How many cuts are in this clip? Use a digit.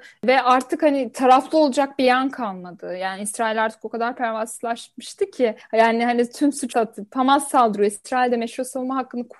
1